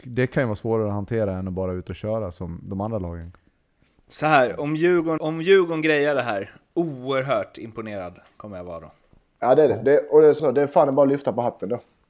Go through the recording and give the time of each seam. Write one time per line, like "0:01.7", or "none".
0:05.2
0:10.4